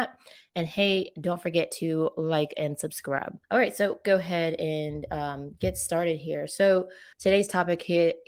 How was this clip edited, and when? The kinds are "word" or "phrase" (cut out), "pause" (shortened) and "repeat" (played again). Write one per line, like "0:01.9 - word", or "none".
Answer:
0:03.4 - pause
0:04.0 - phrase
0:07.1 - pause